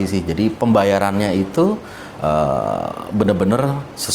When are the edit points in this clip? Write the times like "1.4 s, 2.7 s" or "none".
none